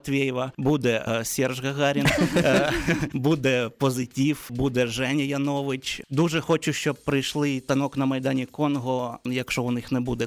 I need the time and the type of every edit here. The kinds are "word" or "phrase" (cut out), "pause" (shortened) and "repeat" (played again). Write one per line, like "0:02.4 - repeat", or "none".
none

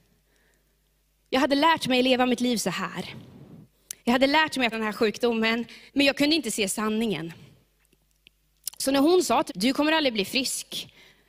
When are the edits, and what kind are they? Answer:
0:04.0 - pause
0:04.7 - word
0:05.9 - pause
0:09.5 - word

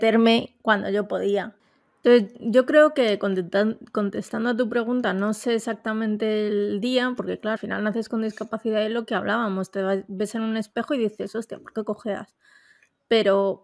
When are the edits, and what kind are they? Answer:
0:07.6 - word

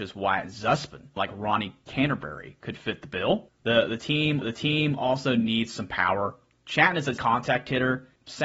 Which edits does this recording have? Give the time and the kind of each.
0:01.2 - phrase
0:04.4 - repeat
0:07.2 - word

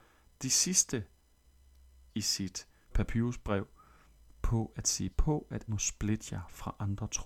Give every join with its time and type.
0:02.1 - word
0:02.9 - word
0:05.1 - word
0:05.7 - word

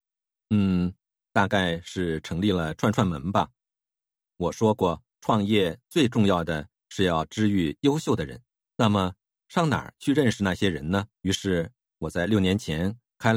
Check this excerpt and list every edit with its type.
0:05.1 - pause
0:08.6 - pause
0:11.1 - pause

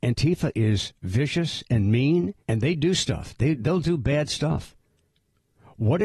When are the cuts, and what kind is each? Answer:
0:02.4 - pause

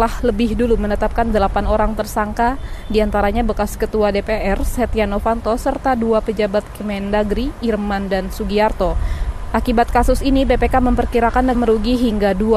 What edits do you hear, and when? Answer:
0:11.5 - word

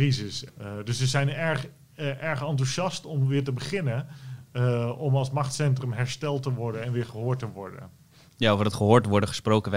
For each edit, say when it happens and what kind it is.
none

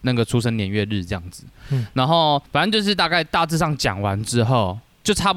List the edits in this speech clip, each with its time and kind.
0:02.5 - pause

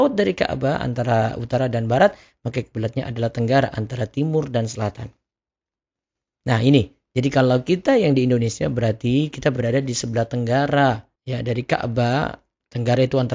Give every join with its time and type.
none

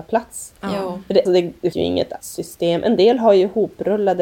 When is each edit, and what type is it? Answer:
0:01.3 - word
0:01.7 - word
0:02.2 - word

